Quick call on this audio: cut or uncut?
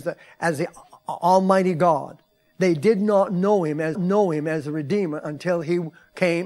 cut